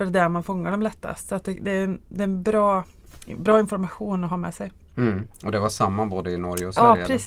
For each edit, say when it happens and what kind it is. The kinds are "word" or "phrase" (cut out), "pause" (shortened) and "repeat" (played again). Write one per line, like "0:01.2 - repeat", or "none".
none

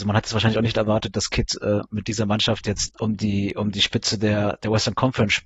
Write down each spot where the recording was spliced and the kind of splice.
0:02.9 - word

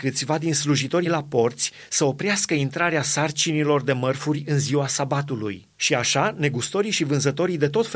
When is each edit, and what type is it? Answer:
0:01.0 - word
0:05.7 - pause

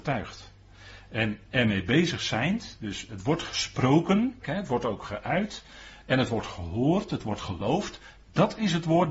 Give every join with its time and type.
0:04.4 - word

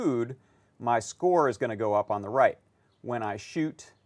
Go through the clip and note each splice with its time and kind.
none

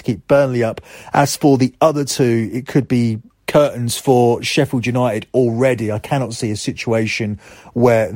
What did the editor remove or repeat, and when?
none

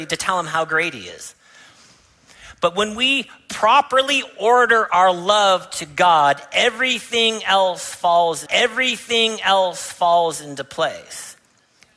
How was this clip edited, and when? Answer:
0:08.5 - repeat

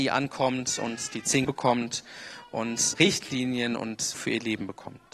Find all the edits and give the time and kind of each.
0:01.4 - word
0:02.9 - word
0:04.1 - word

